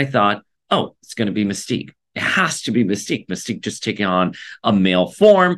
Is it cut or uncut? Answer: uncut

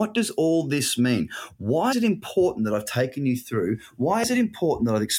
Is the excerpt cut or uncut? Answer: cut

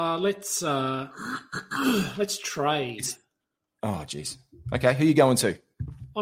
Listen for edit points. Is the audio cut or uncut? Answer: uncut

